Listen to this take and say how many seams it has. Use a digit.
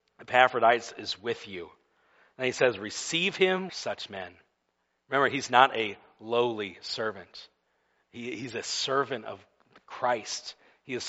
1